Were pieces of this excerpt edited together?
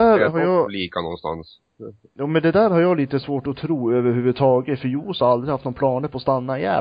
no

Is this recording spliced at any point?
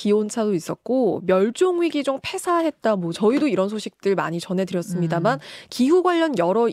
no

